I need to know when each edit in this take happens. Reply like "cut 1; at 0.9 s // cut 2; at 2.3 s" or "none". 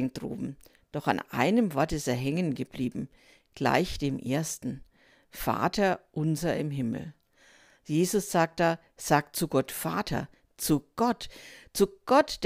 none